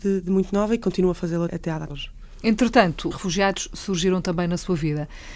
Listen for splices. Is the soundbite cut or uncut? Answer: cut